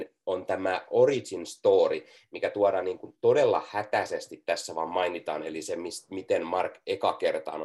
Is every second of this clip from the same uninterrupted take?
yes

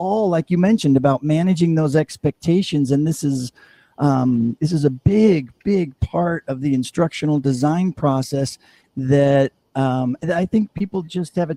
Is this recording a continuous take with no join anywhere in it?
yes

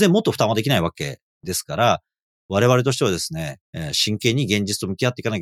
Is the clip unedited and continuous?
no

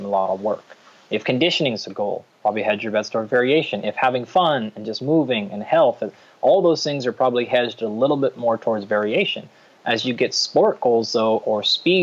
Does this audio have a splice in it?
no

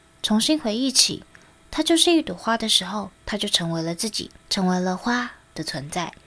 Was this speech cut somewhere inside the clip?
yes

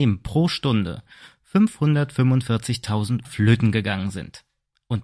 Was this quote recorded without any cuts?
no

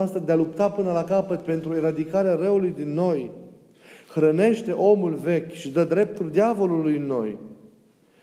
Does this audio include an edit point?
no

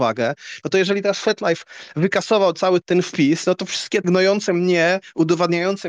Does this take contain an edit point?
yes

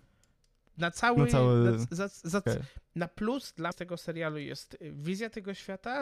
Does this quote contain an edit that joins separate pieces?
yes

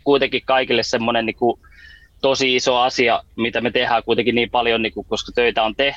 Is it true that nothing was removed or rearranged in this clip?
yes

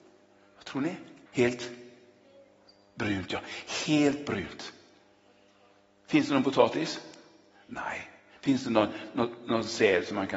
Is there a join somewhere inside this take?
yes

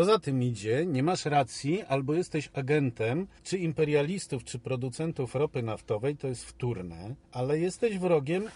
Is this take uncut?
no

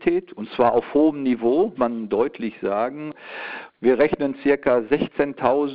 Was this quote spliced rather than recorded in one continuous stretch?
yes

